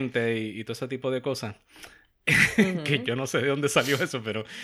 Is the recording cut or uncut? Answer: uncut